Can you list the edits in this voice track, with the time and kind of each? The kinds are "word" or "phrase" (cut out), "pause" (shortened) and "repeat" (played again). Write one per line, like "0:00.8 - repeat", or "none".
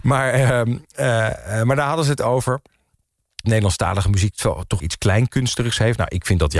0:03.4 - word
0:04.8 - word